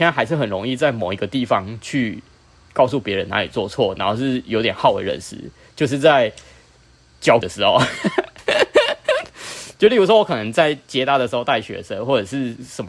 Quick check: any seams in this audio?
yes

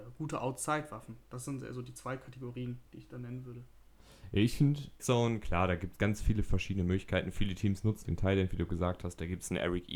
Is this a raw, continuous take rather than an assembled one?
no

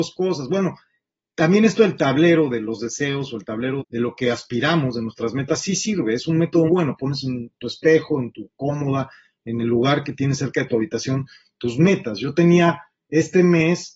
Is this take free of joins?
no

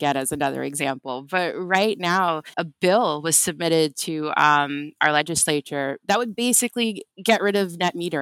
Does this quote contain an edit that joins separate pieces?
yes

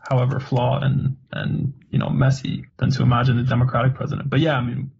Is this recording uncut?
no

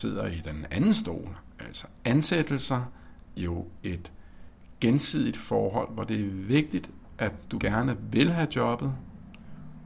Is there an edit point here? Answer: yes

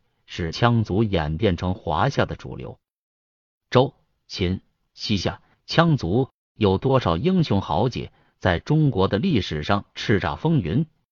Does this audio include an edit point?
no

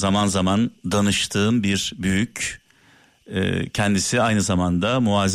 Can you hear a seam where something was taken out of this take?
no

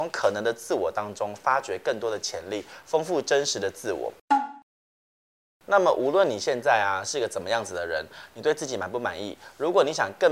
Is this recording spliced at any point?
yes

